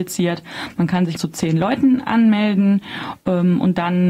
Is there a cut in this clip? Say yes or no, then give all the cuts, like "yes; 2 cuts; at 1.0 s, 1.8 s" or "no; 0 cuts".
yes; 1 cut; at 1.2 s